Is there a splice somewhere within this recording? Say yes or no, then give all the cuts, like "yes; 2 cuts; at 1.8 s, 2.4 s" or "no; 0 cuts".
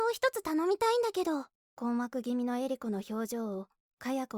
yes; 1 cut; at 1.6 s